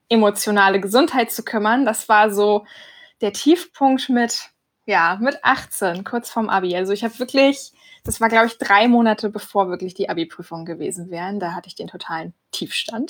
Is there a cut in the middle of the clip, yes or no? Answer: no